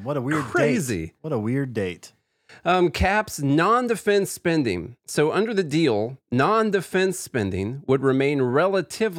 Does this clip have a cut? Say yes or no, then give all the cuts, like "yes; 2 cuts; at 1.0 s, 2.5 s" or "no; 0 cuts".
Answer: yes; 1 cut; at 5.0 s